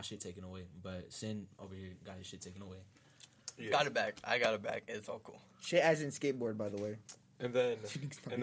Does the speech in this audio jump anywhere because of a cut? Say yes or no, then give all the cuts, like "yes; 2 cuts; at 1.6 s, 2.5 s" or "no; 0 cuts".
no; 0 cuts